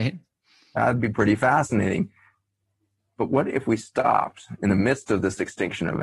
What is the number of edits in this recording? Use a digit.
0